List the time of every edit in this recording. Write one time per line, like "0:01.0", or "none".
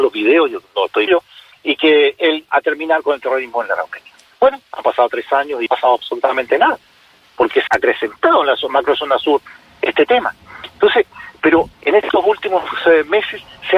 0:01.1
0:01.5
0:02.5
0:05.7
0:07.7
0:11.7

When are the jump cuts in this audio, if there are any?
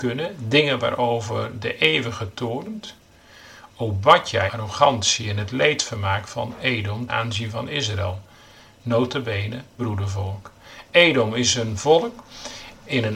0:04.5
0:07.1
0:09.8

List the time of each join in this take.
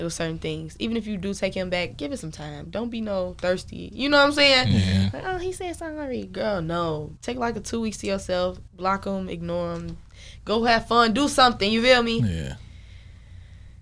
0:07.2
0:08.7

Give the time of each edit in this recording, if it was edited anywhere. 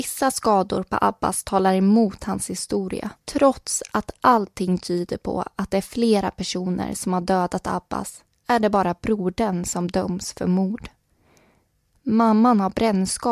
0:03.2

